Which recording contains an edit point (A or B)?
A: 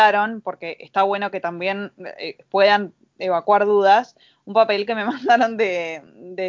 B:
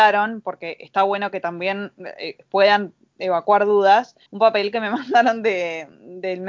B